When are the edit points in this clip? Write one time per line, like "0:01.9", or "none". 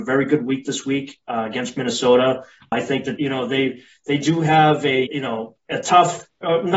0:03.2
0:05.1
0:05.6